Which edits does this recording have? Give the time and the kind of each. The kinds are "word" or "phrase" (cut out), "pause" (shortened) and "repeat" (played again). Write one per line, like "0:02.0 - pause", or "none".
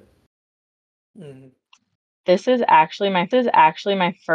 0:03.3 - repeat